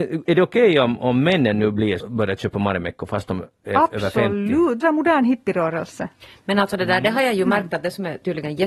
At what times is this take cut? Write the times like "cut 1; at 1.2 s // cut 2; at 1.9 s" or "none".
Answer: cut 1; at 2.0 s // cut 2; at 4.8 s